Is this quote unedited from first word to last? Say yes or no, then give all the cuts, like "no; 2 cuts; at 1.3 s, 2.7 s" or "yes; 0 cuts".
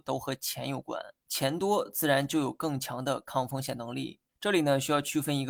no; 2 cuts; at 1.2 s, 4.3 s